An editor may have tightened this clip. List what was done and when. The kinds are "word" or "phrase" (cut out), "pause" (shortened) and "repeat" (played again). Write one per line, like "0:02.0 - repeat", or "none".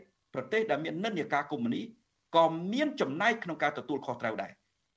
none

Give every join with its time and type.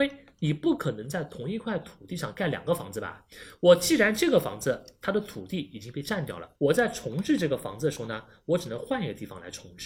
0:06.5 - pause

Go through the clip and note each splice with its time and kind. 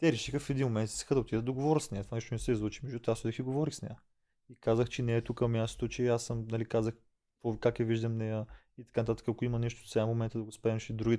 none

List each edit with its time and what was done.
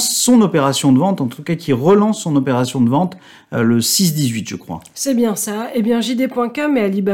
none

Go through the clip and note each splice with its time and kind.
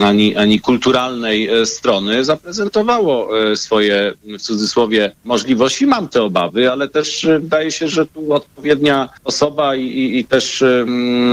0:05.2 - pause
0:09.2 - pause

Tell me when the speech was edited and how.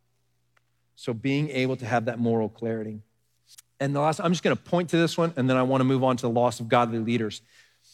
0:03.5 - pause

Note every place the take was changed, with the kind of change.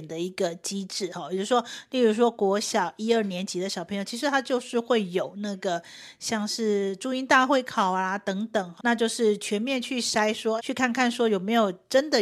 0:08.8 - word
0:10.6 - word

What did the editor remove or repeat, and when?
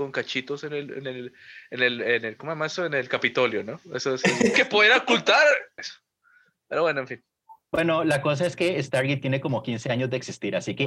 0:04.5 - phrase
0:05.8 - phrase
0:07.6 - pause

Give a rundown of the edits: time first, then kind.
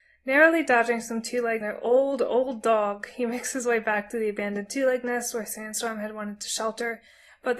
0:01.6 - word

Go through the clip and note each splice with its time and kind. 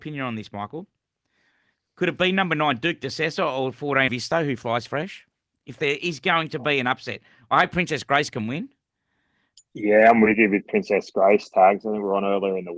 0:04.1 - word

